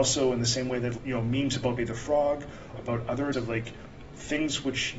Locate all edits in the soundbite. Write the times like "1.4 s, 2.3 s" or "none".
1.0 s, 1.8 s, 2.7 s, 3.3 s